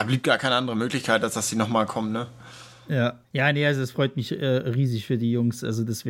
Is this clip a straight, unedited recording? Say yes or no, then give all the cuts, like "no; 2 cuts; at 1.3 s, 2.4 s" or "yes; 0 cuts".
no; 1 cut; at 3.2 s